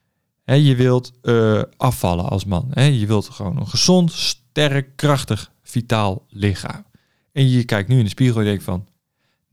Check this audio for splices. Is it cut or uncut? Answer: uncut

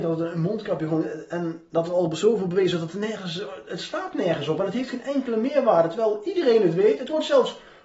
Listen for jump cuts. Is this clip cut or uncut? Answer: uncut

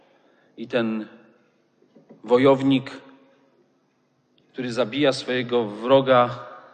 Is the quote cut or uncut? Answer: uncut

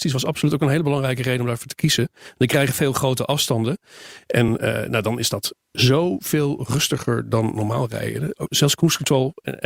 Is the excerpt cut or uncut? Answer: uncut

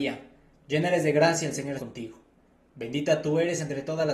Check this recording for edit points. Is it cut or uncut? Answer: cut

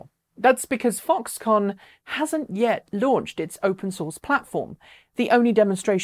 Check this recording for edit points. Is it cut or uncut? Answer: uncut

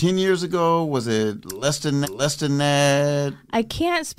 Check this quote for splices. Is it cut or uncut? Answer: cut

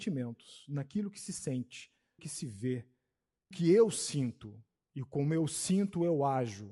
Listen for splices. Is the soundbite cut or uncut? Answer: cut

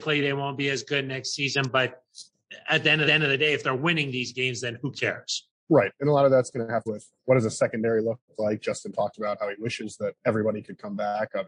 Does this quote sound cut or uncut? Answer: cut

